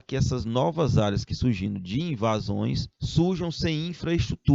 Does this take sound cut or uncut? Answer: cut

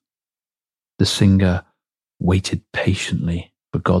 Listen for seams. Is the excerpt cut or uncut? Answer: uncut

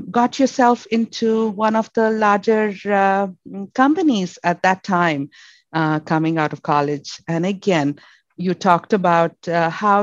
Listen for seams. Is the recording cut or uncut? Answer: uncut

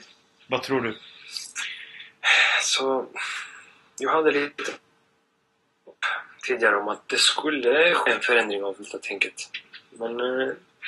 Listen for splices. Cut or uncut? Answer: uncut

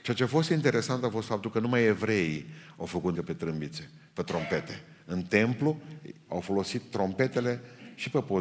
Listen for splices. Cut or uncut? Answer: cut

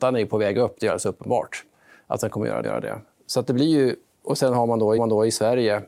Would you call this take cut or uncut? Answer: cut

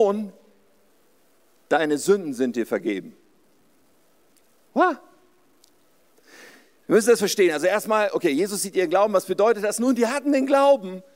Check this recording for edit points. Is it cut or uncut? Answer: uncut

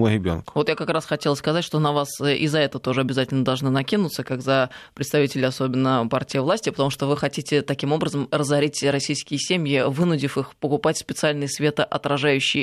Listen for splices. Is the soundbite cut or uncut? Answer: uncut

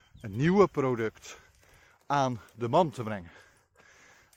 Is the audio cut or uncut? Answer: uncut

